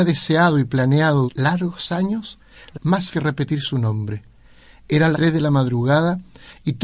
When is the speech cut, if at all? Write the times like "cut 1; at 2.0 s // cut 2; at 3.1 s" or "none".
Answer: cut 1; at 1.3 s // cut 2; at 2.7 s // cut 3; at 3.1 s // cut 4; at 5.1 s

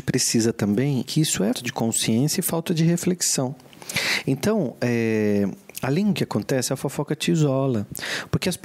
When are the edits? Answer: cut 1; at 1.0 s // cut 2; at 1.5 s // cut 3; at 6.1 s

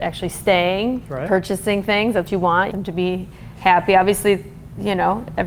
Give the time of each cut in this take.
cut 1; at 1.1 s // cut 2; at 2.3 s // cut 3; at 2.7 s

